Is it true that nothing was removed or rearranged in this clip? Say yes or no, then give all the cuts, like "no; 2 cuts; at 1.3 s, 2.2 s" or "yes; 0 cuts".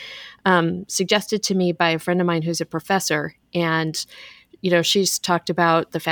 yes; 0 cuts